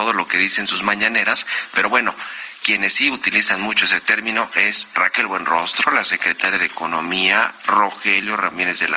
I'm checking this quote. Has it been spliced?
no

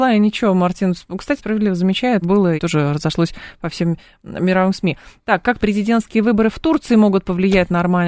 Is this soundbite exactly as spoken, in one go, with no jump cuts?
no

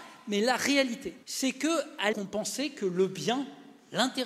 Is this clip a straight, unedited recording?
no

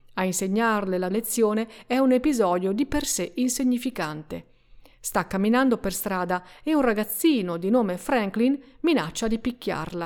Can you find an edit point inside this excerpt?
yes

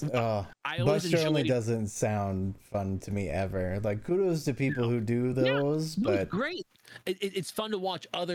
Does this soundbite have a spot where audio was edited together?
no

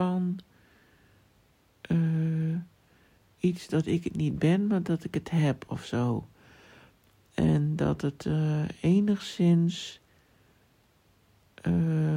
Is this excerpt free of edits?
yes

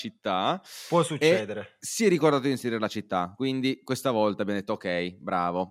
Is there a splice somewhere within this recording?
no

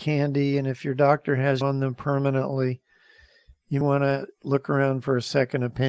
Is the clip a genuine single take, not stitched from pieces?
no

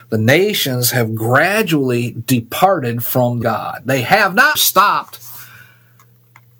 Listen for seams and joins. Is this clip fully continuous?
no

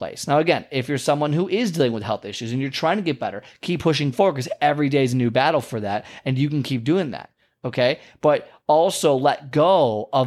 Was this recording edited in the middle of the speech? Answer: no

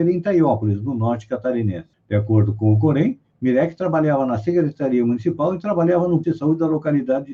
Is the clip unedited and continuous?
no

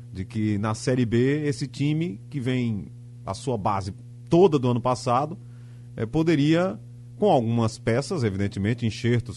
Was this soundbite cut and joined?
no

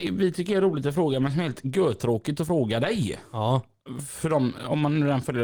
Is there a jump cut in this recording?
no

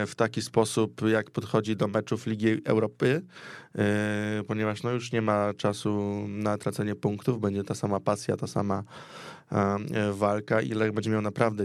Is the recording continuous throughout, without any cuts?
yes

